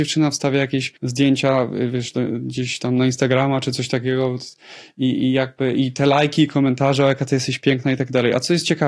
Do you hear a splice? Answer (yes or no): yes